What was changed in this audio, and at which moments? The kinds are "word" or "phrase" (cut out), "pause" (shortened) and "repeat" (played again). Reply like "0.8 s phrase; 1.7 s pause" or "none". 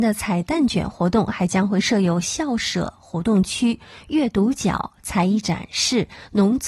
none